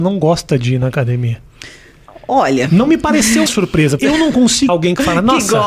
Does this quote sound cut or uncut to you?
cut